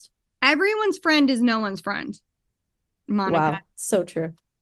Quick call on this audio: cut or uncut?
uncut